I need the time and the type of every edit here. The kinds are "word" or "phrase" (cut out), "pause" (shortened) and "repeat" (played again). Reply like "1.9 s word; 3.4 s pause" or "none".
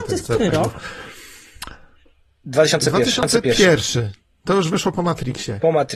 none